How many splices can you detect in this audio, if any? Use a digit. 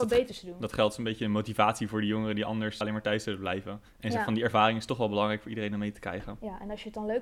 1